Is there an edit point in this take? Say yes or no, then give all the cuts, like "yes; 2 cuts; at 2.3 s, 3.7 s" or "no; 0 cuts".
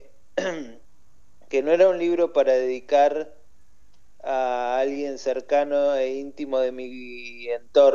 no; 0 cuts